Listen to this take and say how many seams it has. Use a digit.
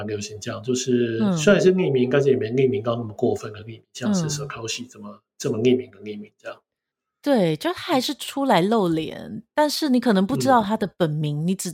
0